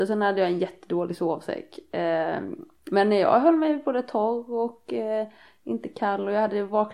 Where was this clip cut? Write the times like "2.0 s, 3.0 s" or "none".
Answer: none